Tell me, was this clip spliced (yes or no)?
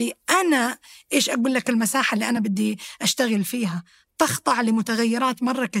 no